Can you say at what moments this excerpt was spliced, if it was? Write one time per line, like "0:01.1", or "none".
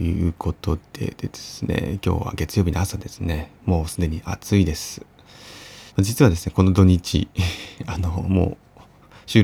0:03.6
0:05.9